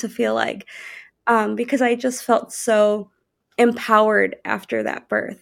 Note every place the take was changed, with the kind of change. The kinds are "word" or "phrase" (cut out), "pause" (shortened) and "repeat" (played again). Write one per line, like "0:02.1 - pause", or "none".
none